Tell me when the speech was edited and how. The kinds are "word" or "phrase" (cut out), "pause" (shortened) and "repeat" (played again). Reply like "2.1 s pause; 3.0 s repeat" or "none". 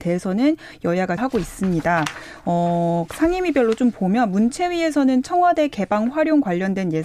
1.2 s phrase; 3.1 s word